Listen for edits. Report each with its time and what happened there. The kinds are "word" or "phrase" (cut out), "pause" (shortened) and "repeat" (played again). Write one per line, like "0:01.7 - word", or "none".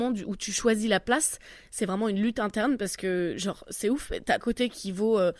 0:04.4 - phrase